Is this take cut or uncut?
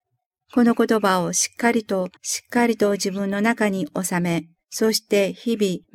cut